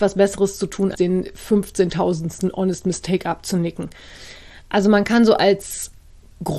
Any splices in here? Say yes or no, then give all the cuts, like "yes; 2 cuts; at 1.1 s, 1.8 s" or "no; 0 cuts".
yes; 1 cut; at 0.9 s